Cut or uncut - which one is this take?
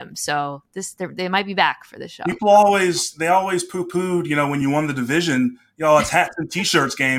uncut